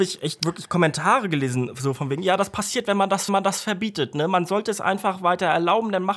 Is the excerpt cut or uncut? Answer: cut